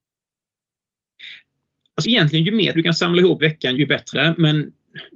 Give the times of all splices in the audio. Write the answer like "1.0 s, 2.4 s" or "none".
2.0 s, 2.7 s, 3.4 s, 3.8 s, 4.1 s